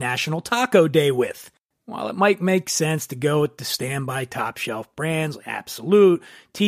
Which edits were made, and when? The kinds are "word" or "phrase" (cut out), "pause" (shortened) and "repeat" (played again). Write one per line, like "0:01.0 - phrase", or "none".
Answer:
none